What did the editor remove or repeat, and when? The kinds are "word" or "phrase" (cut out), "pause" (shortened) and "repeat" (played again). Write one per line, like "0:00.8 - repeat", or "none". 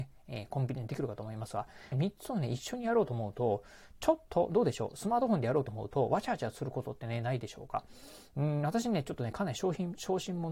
0:01.9 - phrase